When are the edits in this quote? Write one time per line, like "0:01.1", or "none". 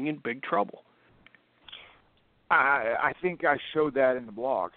none